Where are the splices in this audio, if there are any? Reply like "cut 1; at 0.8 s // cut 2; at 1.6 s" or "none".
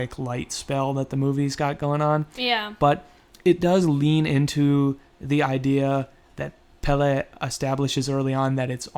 none